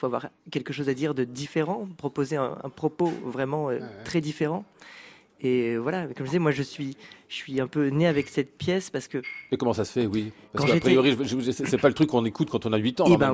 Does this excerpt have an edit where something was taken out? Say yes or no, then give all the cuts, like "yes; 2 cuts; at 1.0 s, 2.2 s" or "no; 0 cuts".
no; 0 cuts